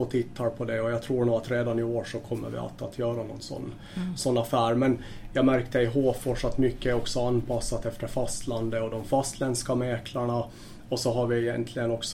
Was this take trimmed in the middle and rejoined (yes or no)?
no